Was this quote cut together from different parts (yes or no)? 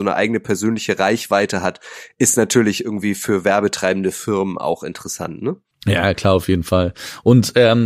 no